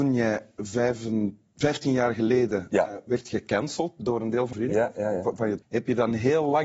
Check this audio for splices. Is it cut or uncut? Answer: cut